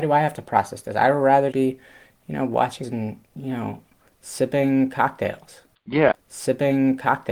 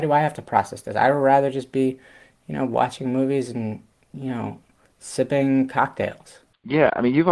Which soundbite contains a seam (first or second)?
first